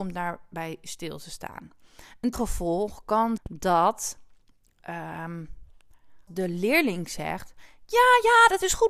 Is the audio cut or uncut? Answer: cut